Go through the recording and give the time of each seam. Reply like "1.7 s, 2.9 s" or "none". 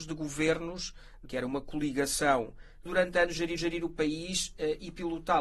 1.3 s, 2.9 s, 3.6 s